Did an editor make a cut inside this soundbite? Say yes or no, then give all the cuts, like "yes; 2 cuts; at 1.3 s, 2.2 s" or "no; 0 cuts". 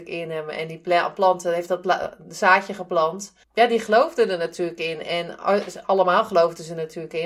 yes; 1 cut; at 3.4 s